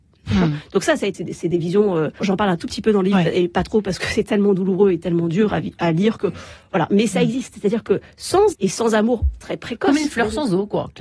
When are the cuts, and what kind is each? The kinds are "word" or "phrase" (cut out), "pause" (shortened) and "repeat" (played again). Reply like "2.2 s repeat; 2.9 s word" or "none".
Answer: 1.1 s word; 2.2 s word; 8.5 s word